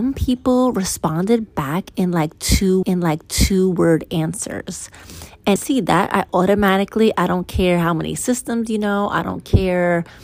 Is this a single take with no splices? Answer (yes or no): no